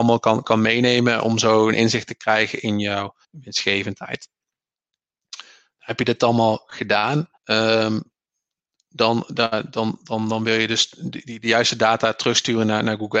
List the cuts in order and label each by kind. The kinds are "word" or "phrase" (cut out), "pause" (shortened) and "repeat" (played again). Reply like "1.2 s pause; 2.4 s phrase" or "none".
3.2 s pause; 7.4 s pause